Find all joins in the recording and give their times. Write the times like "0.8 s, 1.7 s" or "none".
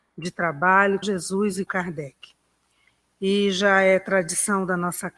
1.0 s, 1.7 s